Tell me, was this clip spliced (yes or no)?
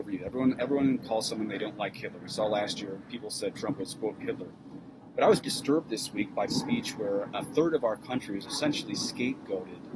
yes